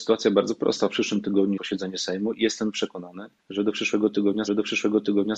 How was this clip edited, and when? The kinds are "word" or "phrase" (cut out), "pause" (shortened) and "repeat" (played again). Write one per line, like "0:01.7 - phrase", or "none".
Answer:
0:01.6 - word
0:03.4 - pause
0:04.5 - repeat

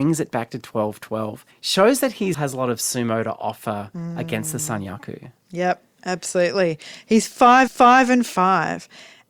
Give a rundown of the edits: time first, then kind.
0:01.5 - pause
0:02.3 - word
0:07.7 - repeat

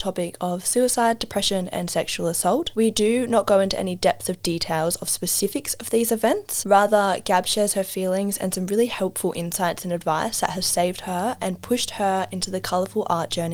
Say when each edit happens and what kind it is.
none

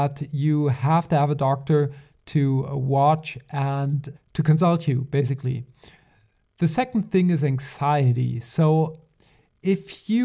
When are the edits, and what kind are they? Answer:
0:04.1 - word

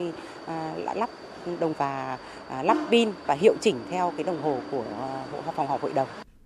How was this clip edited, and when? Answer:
0:01.7 - word

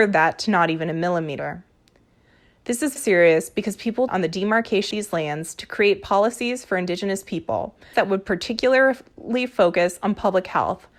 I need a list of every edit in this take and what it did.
0:03.0 - word
0:04.1 - word
0:04.9 - word
0:07.9 - word

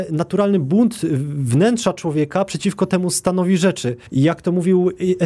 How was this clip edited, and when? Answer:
0:04.1 - pause

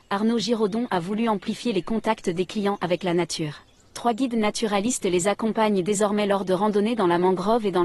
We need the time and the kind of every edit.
0:03.8 - pause

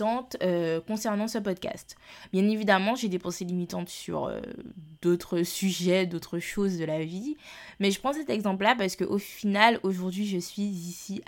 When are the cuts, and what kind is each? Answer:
0:05.0 - pause

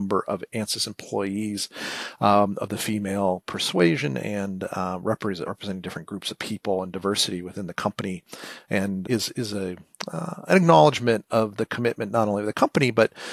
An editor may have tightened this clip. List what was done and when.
0:05.5 - word
0:09.0 - word

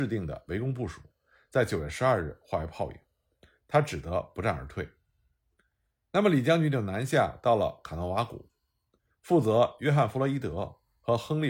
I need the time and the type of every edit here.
none

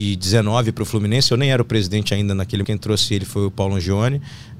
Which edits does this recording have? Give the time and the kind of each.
0:02.6 - word

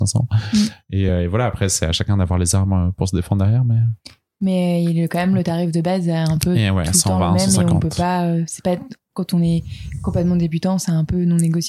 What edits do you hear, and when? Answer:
none

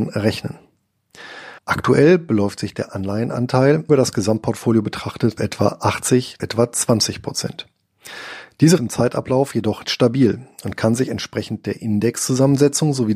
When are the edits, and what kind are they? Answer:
0:01.6 - pause
0:03.9 - word
0:05.4 - word
0:06.4 - phrase
0:08.8 - phrase
0:09.8 - word

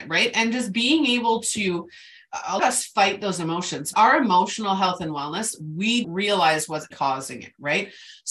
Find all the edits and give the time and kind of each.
0:02.6 - phrase
0:03.9 - word
0:06.0 - word
0:06.9 - word

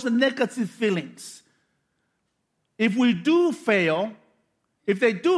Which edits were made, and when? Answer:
none

